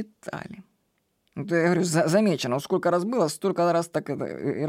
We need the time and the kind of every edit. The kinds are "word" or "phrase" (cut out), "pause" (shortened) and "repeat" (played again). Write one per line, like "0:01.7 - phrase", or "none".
none